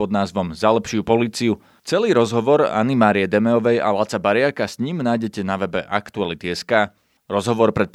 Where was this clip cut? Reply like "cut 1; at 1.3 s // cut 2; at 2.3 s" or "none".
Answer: none